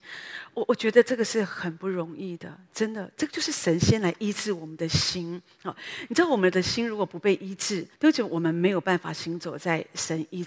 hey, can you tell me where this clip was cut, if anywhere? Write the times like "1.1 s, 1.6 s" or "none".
7.9 s